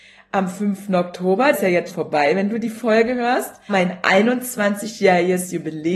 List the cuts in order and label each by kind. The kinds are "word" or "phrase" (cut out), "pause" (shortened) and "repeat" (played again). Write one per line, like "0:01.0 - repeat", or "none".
0:01.5 - word
0:01.9 - word
0:03.7 - word